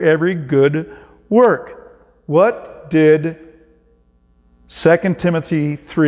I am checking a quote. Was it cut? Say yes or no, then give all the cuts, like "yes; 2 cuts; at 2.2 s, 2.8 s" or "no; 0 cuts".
no; 0 cuts